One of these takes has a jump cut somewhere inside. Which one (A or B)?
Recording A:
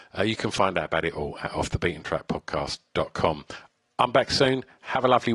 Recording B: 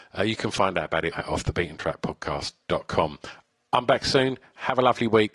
B